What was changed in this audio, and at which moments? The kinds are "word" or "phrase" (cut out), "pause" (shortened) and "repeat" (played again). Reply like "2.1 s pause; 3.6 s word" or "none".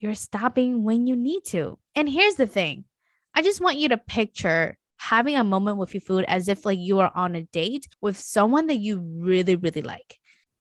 7.9 s pause